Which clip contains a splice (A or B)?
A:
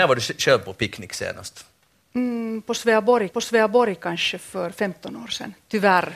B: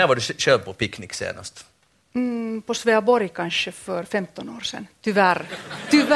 A